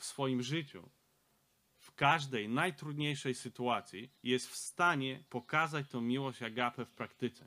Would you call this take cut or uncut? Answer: cut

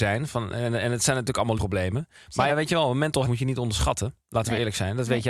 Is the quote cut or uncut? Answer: cut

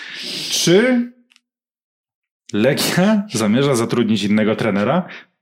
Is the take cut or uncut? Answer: uncut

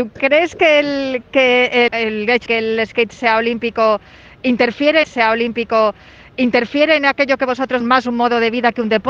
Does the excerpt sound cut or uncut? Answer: cut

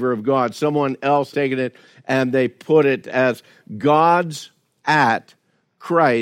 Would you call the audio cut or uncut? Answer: cut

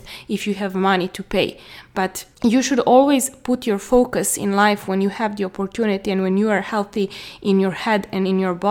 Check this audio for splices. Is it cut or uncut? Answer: cut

